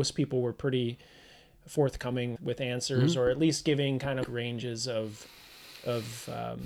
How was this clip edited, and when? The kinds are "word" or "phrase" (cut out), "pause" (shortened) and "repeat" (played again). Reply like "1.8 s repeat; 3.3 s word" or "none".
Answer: 2.4 s word; 4.2 s word